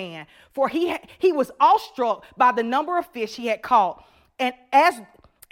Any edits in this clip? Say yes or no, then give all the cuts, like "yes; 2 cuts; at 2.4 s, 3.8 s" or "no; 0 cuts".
no; 0 cuts